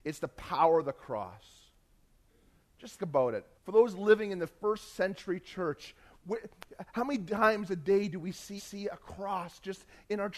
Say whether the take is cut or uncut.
cut